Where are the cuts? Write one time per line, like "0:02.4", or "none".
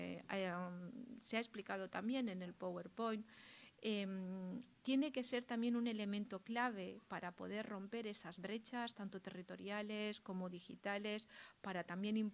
none

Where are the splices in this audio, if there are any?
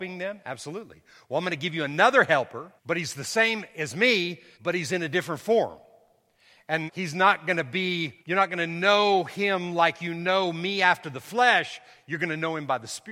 0:02.8
0:04.5
0:06.9
0:08.2

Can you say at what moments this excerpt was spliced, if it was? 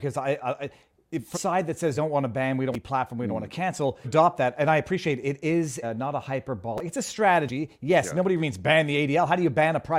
0:01.3
0:02.0
0:02.7
0:04.0
0:05.8
0:08.4

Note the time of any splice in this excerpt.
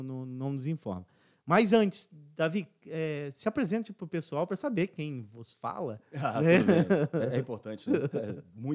none

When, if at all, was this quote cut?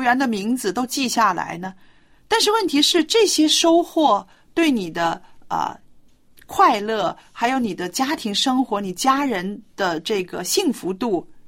none

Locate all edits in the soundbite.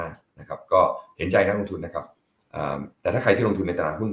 0:02.9

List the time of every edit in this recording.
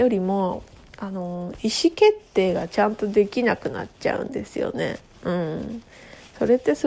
none

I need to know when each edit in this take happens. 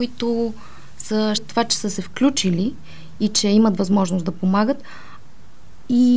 0:01.4

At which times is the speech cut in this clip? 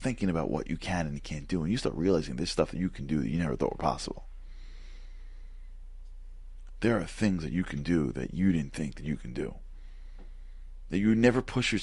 none

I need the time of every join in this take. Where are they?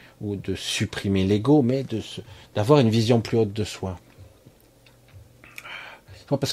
none

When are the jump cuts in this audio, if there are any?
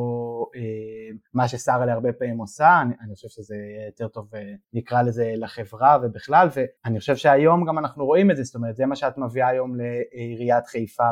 0:01.3
0:04.6
0:06.8

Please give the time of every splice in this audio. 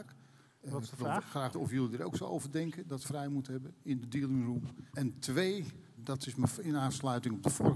0:01.5
0:03.0
0:04.9
0:06.0

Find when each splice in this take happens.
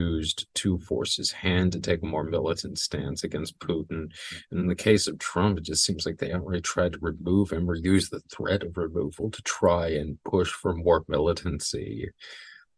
none

